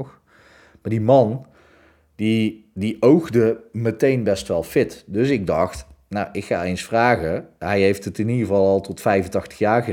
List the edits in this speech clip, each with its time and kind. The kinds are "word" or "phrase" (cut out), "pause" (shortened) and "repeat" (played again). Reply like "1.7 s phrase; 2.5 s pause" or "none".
none